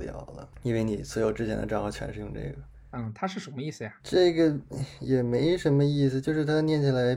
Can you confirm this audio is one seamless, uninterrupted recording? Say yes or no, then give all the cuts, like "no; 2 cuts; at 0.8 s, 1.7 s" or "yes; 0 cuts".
no; 1 cut; at 4.0 s